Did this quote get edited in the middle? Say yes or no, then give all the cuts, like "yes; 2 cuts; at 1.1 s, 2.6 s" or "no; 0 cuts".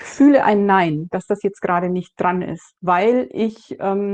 yes; 1 cut; at 2.8 s